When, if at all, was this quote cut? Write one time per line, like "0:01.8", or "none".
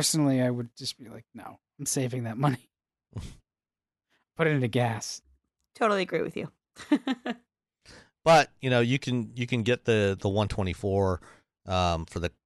none